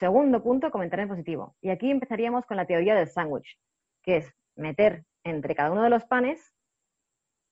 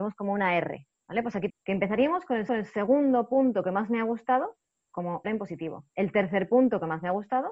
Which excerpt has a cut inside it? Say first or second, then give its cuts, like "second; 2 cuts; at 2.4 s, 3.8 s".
second; 5 cuts; at 1.0 s, 1.5 s, 2.5 s, 5.2 s, 5.9 s